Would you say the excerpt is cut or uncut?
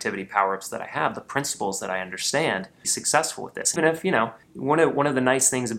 cut